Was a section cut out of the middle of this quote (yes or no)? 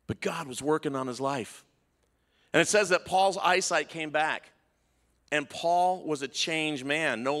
no